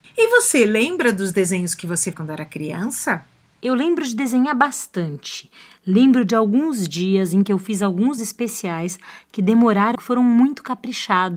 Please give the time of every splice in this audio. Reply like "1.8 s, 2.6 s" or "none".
2.1 s, 8.2 s, 9.9 s

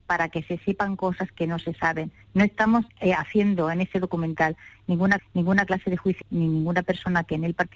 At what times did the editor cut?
2.2 s, 2.9 s, 5.2 s, 6.2 s

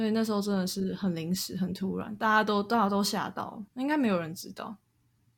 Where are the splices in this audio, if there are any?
3.7 s

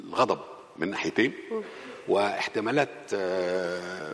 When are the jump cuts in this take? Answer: none

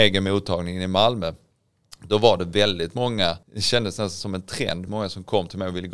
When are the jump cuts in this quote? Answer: 3.4 s, 4.9 s

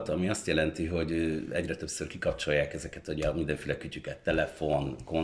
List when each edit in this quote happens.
none

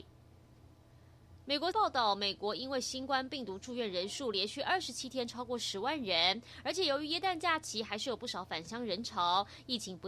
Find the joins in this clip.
1.7 s

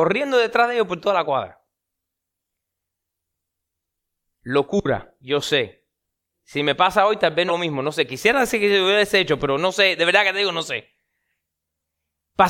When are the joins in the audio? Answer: 7.5 s

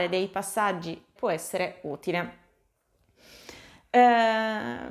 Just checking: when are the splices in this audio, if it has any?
1.2 s

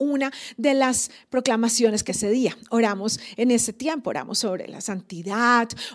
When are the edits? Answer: 2.1 s

